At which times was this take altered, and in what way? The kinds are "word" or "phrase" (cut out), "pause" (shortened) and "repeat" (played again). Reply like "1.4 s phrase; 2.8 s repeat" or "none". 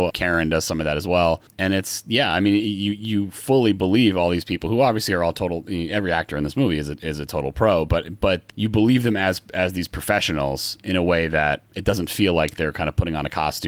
1.5 s pause